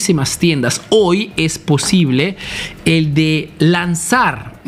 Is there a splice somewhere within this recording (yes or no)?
no